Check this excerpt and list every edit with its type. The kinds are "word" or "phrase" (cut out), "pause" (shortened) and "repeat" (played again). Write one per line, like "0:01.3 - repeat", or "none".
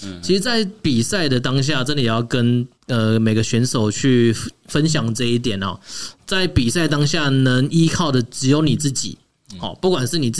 0:02.8 - pause